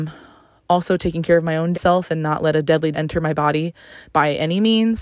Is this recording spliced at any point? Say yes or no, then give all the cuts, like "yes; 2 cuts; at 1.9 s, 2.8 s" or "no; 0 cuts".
yes; 2 cuts; at 1.7 s, 2.9 s